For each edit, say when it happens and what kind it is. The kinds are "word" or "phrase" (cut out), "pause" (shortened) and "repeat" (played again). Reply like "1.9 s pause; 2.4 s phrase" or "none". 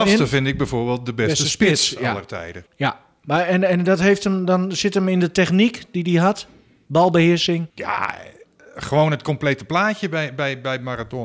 2.7 s pause; 7.7 s pause